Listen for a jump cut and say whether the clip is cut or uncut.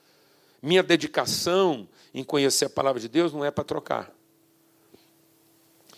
uncut